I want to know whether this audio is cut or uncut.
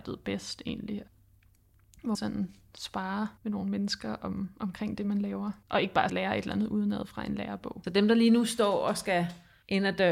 cut